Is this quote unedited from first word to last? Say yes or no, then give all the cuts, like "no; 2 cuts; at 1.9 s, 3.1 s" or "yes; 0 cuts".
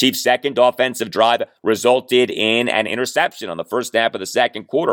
yes; 0 cuts